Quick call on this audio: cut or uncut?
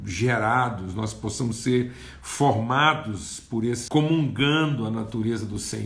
cut